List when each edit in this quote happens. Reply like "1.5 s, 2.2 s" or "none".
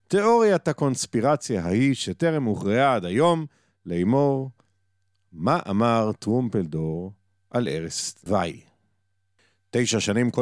none